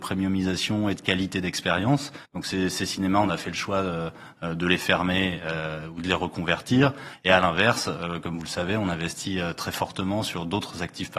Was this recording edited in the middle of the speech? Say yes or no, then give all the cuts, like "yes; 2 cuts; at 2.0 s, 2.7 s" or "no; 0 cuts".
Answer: yes; 1 cut; at 2.2 s